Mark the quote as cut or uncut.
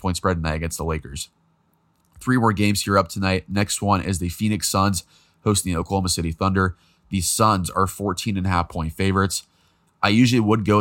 uncut